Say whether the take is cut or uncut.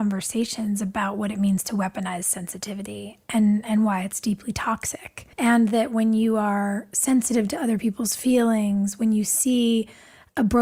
cut